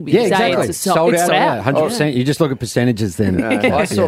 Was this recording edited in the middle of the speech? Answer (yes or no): yes